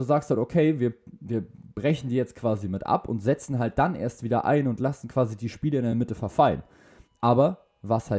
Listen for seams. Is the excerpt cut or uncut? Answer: uncut